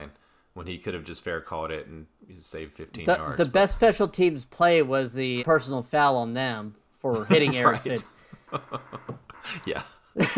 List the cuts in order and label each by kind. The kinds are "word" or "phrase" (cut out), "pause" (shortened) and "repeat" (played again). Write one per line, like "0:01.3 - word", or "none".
0:05.4 - word